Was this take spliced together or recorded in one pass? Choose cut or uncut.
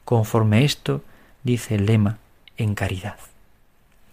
uncut